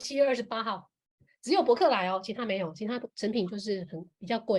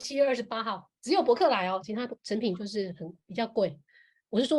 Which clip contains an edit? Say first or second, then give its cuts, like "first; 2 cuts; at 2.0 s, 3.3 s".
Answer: second; 2 cuts; at 1.0 s, 1.8 s